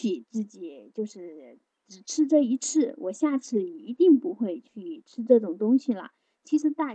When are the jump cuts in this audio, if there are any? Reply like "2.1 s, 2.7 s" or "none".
none